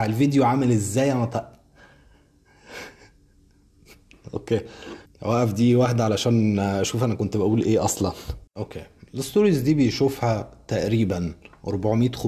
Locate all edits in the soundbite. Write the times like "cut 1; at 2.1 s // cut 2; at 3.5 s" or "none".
cut 1; at 5.1 s // cut 2; at 8.5 s